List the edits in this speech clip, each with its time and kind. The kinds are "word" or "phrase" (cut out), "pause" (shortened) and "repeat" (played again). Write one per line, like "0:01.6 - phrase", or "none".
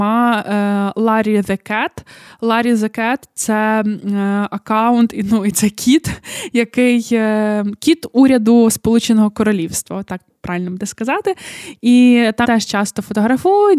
0:12.4 - word